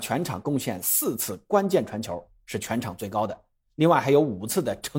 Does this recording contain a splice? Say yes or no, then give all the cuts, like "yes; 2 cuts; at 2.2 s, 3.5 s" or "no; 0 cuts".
no; 0 cuts